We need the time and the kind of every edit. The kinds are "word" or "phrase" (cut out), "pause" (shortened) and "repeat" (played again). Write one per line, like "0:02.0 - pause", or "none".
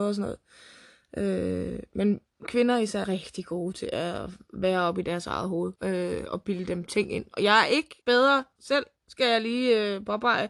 0:03.0 - word
0:05.8 - pause
0:08.0 - pause

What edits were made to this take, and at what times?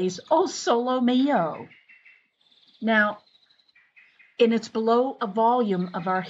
none

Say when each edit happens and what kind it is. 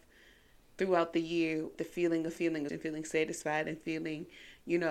0:01.8 - word
0:02.7 - word

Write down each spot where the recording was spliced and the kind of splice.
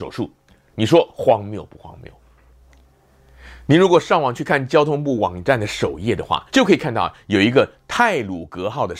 0:06.5 - pause

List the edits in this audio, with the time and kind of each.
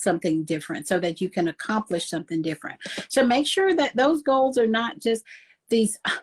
none

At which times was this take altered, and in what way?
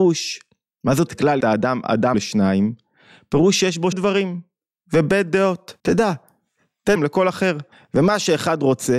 0:01.1 - word
0:01.4 - phrase
0:02.1 - word
0:03.9 - word
0:05.8 - pause
0:07.0 - word
0:07.7 - pause

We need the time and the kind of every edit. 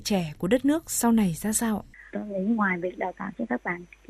none

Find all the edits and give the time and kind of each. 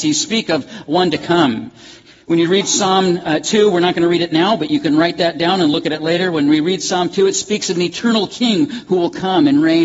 none

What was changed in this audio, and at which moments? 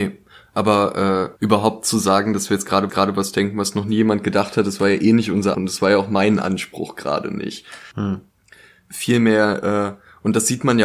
0:01.4 - word
0:02.9 - repeat
0:05.5 - word

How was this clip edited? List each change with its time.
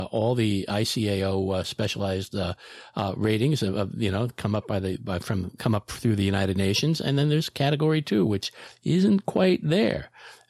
none

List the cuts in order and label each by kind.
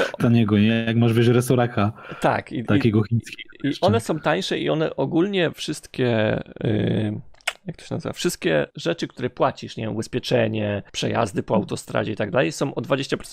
0:05.5 - word
0:08.7 - pause
0:10.9 - pause

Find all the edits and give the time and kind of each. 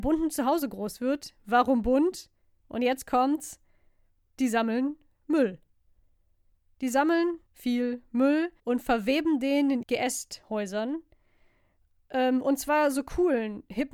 0:07.5 - word
0:08.6 - pause
0:09.8 - word

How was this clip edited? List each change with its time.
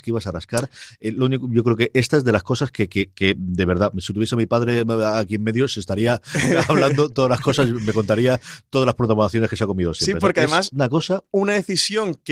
none

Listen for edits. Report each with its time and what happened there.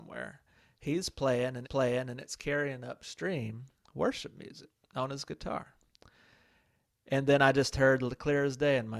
0:01.6 - repeat

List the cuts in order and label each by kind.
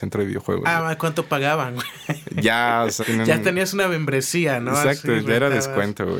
0:03.0 - word

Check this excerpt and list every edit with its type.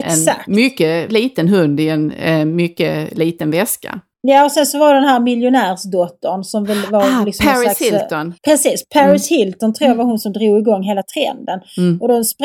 0:01.1 - word
0:04.1 - pause
0:08.4 - pause

